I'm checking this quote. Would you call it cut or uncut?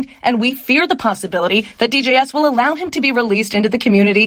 uncut